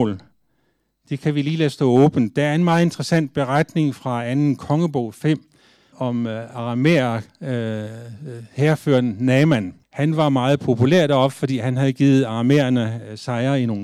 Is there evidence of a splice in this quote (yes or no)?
yes